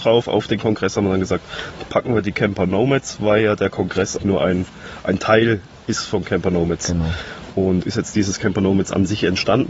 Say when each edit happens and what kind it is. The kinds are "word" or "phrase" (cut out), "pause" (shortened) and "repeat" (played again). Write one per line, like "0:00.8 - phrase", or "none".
0:04.2 - word
0:07.8 - word